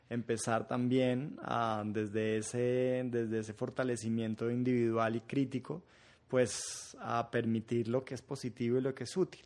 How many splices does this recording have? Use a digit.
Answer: 0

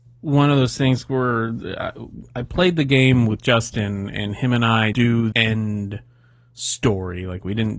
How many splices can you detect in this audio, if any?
2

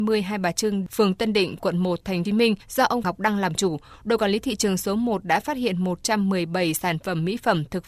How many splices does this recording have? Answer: 2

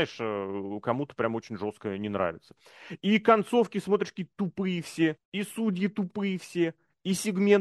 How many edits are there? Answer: 1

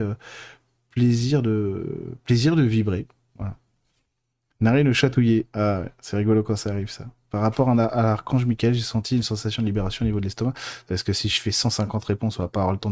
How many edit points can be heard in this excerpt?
0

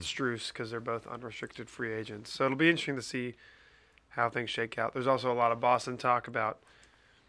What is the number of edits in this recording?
0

